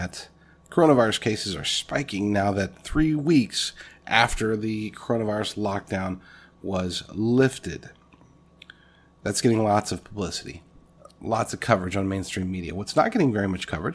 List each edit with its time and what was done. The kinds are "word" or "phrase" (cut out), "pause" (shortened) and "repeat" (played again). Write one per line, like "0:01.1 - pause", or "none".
none